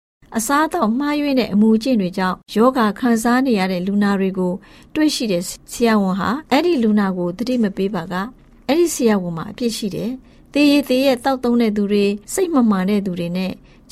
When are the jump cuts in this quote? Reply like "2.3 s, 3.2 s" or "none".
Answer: 2.4 s, 6.5 s, 12.2 s